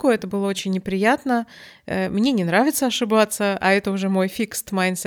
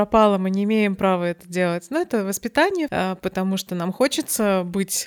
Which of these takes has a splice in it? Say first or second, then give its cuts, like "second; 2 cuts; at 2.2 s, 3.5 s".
second; 1 cut; at 2.9 s